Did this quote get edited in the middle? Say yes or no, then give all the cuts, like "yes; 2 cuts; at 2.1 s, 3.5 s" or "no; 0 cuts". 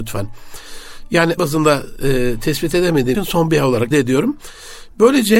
yes; 3 cuts; at 1.4 s, 3.1 s, 3.9 s